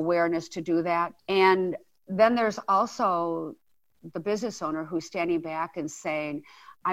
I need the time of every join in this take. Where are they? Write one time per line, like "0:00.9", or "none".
0:01.2